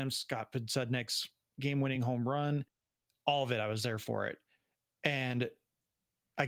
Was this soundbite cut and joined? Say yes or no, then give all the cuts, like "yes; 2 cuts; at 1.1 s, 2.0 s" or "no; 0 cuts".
no; 0 cuts